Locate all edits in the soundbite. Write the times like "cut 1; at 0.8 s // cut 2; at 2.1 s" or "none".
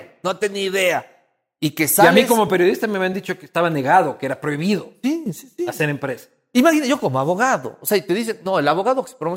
none